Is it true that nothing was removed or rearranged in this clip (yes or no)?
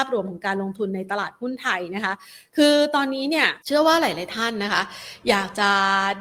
no